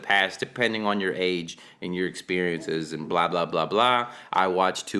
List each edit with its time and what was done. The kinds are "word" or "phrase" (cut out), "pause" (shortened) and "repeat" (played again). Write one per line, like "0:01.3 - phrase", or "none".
none